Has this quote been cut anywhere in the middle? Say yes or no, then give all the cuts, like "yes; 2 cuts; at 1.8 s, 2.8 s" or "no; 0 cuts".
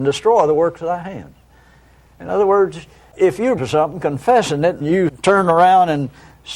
yes; 2 cuts; at 3.6 s, 4.8 s